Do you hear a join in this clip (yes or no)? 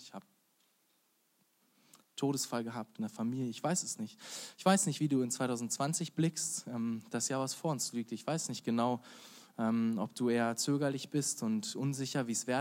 no